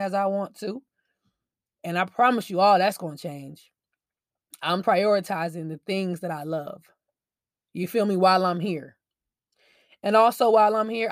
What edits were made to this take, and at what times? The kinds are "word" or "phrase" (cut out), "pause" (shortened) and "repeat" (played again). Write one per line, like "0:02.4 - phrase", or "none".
0:04.8 - phrase

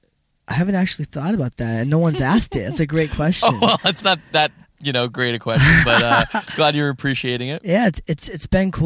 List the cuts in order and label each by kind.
none

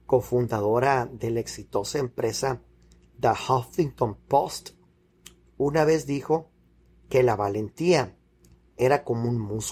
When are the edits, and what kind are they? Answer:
none

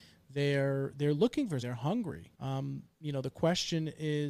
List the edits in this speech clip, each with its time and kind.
0:01.6 - word
0:02.3 - pause

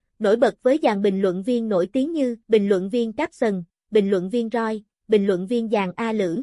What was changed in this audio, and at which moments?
0:02.4 - pause

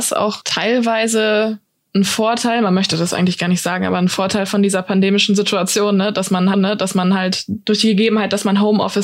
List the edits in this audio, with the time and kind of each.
0:06.5 - repeat

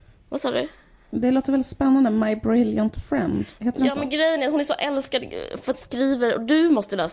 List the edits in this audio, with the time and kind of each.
0:05.7 - word

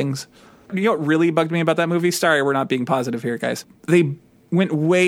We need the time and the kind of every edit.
none

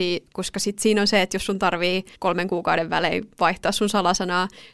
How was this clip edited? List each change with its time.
0:02.1 - pause

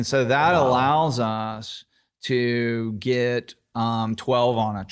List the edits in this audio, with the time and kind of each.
none

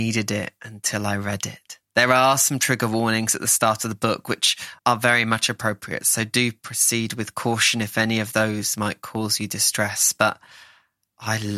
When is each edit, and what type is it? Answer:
0:01.9 - pause
0:04.8 - pause

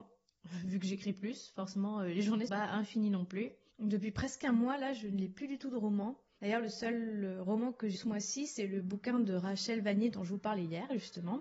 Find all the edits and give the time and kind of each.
0:02.5 - word
0:08.0 - word

